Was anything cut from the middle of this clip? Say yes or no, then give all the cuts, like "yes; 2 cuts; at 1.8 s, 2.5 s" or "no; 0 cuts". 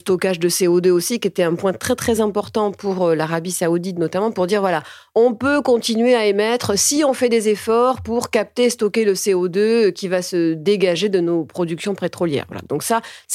no; 0 cuts